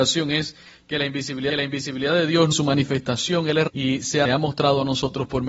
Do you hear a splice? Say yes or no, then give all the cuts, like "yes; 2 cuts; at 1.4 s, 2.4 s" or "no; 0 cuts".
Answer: yes; 4 cuts; at 1.5 s, 2.5 s, 3.7 s, 4.2 s